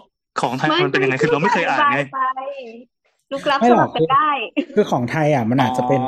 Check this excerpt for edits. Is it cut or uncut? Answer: uncut